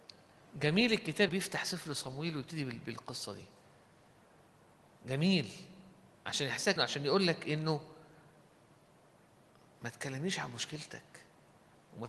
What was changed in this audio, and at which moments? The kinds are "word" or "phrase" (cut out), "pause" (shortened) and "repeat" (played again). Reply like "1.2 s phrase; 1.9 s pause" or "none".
1.3 s word; 6.8 s word